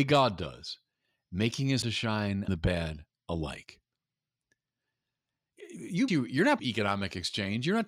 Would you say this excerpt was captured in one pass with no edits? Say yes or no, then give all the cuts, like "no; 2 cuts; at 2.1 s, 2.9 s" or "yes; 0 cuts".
no; 4 cuts; at 1.8 s, 2.5 s, 6.1 s, 6.6 s